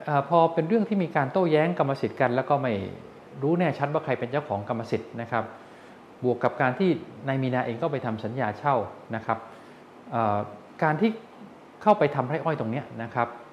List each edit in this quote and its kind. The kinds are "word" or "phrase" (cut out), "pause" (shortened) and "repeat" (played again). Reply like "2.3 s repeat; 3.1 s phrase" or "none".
none